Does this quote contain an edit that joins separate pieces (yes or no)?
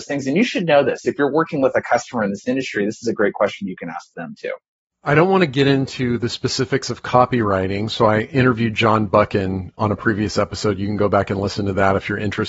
no